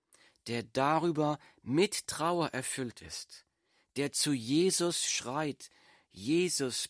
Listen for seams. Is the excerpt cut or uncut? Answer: uncut